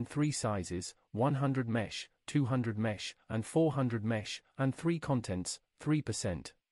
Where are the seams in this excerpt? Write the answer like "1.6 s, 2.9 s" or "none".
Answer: none